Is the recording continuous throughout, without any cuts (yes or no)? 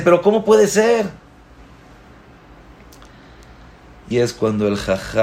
no